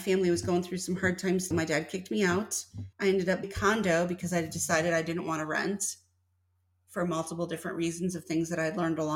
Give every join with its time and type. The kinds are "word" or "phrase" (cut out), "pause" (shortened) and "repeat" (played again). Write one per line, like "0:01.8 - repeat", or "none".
0:01.5 - phrase
0:02.9 - pause
0:03.4 - word